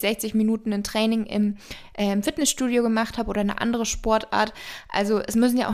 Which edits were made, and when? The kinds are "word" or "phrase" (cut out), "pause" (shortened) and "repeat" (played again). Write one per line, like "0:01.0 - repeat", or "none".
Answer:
none